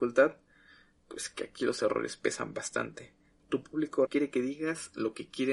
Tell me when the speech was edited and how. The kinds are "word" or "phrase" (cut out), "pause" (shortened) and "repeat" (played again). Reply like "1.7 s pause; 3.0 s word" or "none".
4.1 s word

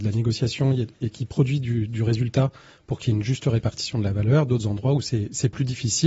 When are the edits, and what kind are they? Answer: none

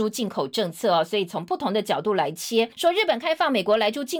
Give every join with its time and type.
2.7 s pause

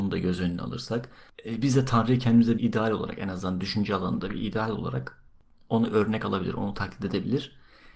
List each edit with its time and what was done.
2.6 s word

